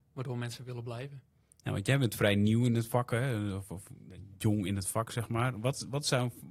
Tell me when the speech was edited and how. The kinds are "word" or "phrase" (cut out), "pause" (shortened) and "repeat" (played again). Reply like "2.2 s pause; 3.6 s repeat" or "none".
none